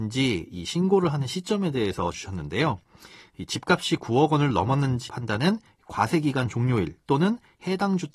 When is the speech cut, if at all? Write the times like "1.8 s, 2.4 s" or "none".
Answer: 2.1 s, 5.1 s